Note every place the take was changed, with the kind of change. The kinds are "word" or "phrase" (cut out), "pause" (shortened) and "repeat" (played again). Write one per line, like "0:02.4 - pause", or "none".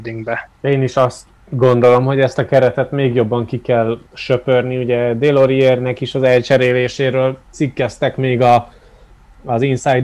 0:01.4 - pause
0:04.1 - pause